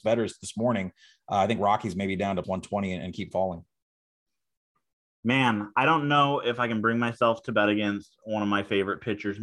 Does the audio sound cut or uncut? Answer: cut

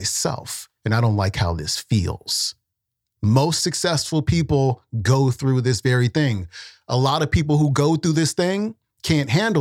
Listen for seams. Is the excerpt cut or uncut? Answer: uncut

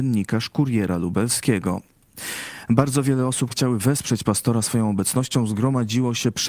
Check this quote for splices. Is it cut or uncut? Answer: cut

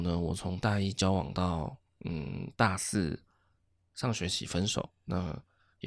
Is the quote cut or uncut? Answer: uncut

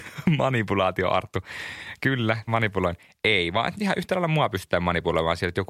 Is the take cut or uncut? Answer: cut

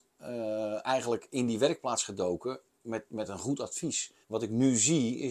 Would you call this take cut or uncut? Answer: cut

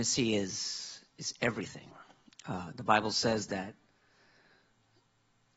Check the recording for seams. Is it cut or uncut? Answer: uncut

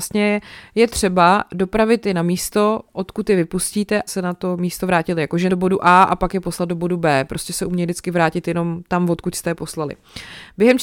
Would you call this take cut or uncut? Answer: cut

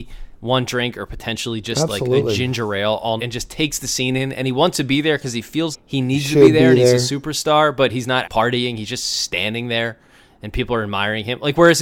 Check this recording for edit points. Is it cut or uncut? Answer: cut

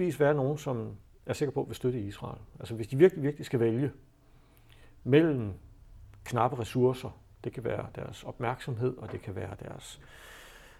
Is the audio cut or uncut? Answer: uncut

